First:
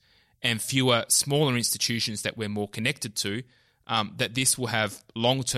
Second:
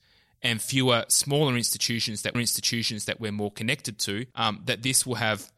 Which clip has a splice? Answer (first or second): second